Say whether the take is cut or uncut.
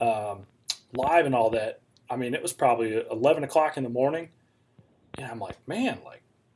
uncut